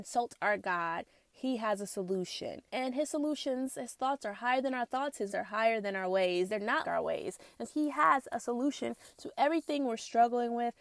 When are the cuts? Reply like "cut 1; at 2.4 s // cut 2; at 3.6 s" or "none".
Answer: cut 1; at 2.7 s // cut 2; at 5.3 s // cut 3; at 6.8 s // cut 4; at 7.7 s